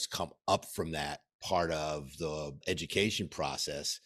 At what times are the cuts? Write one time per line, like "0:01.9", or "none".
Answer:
0:01.3
0:02.6